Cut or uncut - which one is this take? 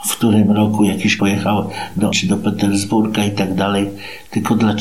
cut